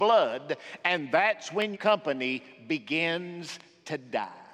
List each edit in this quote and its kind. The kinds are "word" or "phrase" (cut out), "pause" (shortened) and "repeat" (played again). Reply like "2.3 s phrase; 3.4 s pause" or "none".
1.7 s word